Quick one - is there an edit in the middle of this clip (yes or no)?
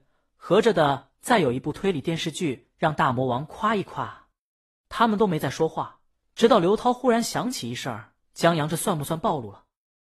yes